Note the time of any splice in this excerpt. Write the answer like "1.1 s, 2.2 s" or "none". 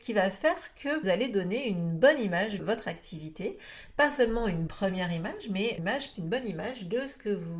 1.0 s, 2.6 s, 4.7 s, 5.8 s, 6.1 s